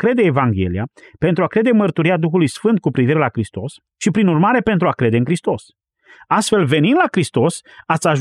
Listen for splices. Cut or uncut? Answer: uncut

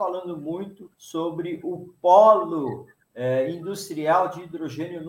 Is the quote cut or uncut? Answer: cut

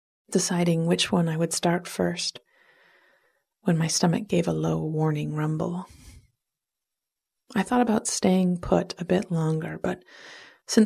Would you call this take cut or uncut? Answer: uncut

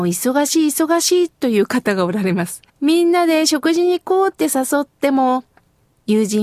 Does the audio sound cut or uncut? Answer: cut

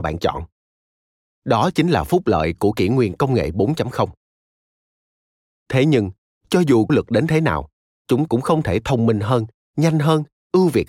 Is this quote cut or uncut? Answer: cut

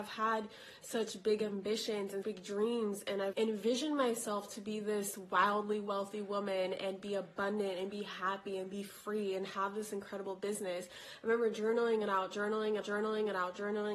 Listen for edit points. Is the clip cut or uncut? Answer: cut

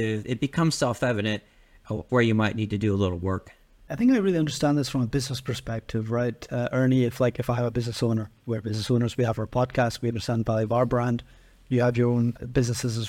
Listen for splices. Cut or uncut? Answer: cut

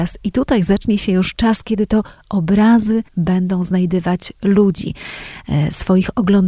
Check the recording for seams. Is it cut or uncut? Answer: cut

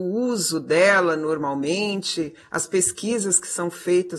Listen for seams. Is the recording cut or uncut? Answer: uncut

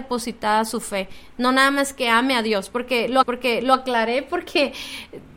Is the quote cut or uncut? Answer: cut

